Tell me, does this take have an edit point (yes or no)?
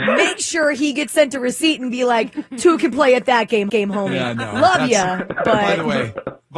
yes